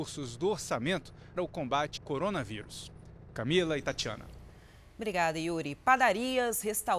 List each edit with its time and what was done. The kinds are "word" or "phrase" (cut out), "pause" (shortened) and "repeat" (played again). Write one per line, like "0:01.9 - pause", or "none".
0:01.4 - word
0:02.0 - word

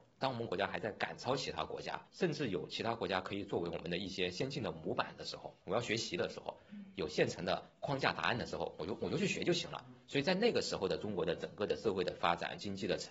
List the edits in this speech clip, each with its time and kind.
0:02.1 - pause

